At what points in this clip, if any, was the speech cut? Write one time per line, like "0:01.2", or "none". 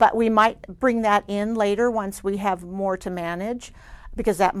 none